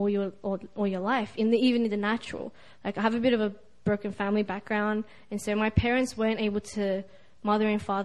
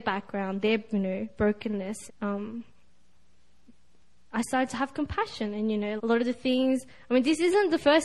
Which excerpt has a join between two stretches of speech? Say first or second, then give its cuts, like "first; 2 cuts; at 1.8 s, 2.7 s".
second; 2 cuts; at 2.1 s, 6.0 s